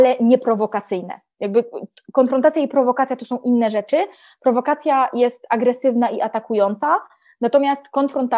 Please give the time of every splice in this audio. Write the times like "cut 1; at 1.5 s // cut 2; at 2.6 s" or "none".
none